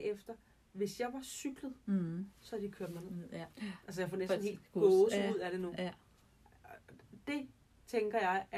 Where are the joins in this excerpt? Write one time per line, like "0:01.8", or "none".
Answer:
0:02.4
0:03.5